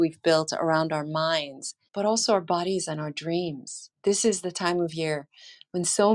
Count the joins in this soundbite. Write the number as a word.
two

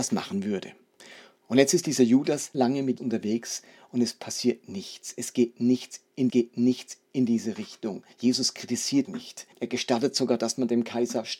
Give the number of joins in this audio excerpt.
six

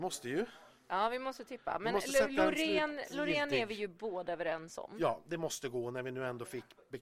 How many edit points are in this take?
zero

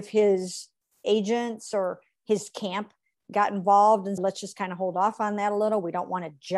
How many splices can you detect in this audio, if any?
one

